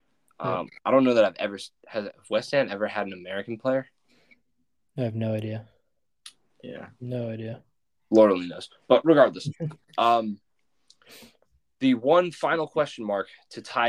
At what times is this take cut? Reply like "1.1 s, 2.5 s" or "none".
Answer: none